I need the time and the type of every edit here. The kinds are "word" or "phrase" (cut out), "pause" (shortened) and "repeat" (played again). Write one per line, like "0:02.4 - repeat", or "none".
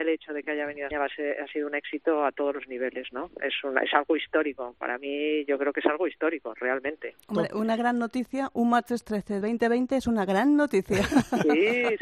0:00.9 - word
0:09.4 - word